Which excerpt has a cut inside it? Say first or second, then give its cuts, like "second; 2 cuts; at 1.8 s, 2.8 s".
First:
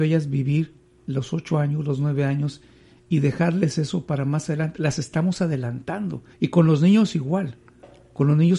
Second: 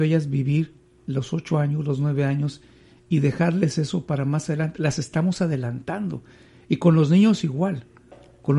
first; 1 cut; at 6.3 s